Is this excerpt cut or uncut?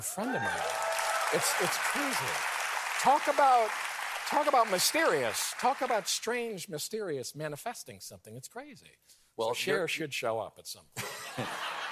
cut